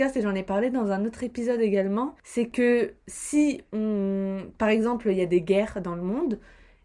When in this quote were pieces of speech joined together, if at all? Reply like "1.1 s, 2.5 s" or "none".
2.2 s

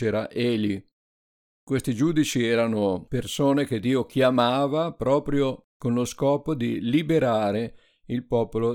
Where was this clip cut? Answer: none

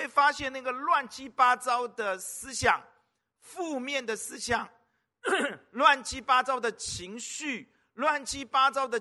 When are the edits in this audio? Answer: none

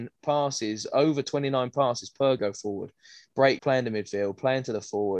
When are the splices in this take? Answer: 2.4 s, 3.6 s

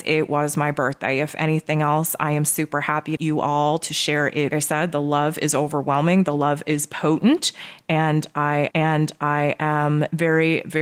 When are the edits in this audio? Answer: 3.2 s, 4.5 s, 8.7 s

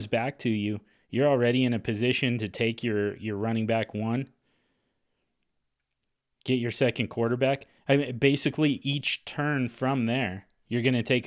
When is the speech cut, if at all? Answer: none

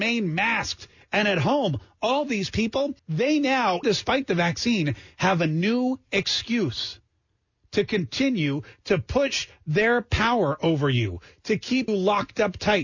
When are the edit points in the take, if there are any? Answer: 3.0 s, 3.8 s, 11.9 s

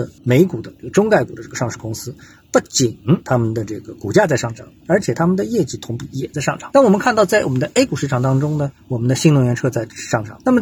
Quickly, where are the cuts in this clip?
none

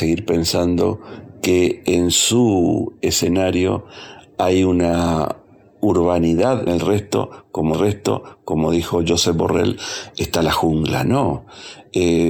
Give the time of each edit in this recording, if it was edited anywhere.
6.7 s, 7.7 s

